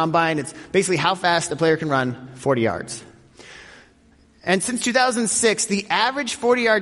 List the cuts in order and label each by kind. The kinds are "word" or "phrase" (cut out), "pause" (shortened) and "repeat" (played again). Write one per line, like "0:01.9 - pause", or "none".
none

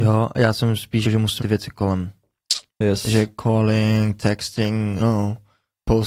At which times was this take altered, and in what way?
0:01.0 - word
0:01.4 - phrase
0:02.7 - pause
0:05.0 - word

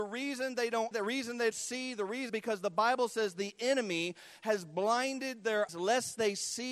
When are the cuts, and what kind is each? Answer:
0:00.9 - word
0:01.5 - word
0:02.3 - word
0:05.7 - word

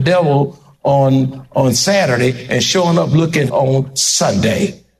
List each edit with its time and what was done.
0:03.5 - word

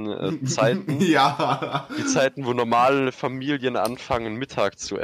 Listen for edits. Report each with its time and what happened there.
none

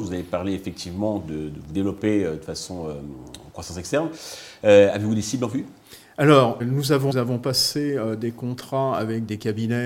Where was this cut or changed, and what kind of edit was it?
0:06.6 - word
0:07.1 - phrase

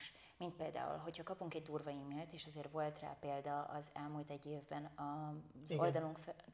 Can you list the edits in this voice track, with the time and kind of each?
none

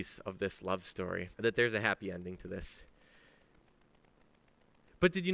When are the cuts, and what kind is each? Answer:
0:01.3 - pause

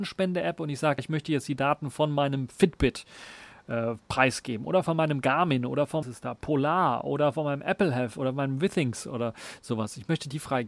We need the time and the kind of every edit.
0:01.0 - word
0:06.0 - phrase

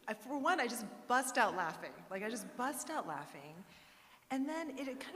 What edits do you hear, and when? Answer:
none

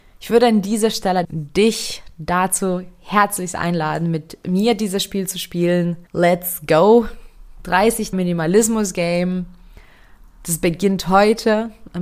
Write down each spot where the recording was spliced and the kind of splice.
0:01.2 - word
0:06.1 - pause
0:08.1 - word

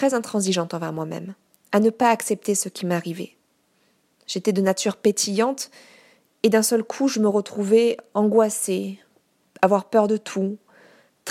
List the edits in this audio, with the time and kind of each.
none

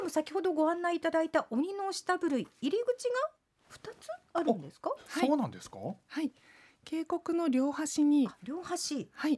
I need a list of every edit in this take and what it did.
none

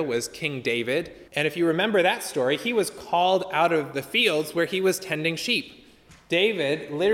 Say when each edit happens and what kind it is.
0:01.3 - pause

